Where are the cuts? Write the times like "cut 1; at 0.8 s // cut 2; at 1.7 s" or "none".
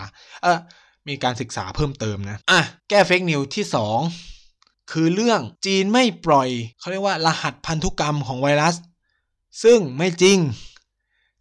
cut 1; at 2.4 s // cut 2; at 2.8 s // cut 3; at 4.7 s // cut 4; at 5.5 s // cut 5; at 6.7 s